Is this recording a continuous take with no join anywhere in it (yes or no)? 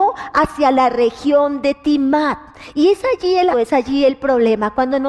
no